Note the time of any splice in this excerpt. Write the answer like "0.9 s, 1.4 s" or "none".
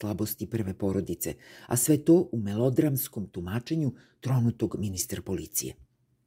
none